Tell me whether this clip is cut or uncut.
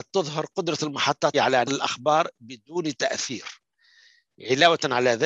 cut